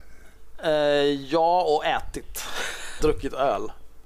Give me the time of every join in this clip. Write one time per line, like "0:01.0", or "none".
0:03.0